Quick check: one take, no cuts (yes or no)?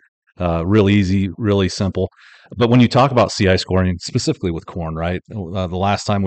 yes